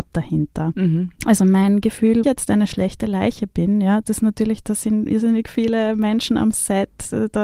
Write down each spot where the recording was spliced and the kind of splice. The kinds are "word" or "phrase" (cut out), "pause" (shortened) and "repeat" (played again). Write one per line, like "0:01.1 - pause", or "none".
0:01.2 - pause
0:02.2 - phrase
0:04.0 - phrase